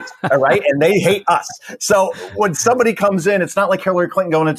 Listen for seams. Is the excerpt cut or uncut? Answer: uncut